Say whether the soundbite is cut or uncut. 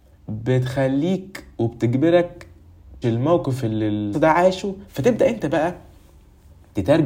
cut